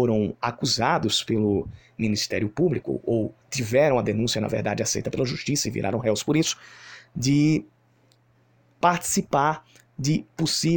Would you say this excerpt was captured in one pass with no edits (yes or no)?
no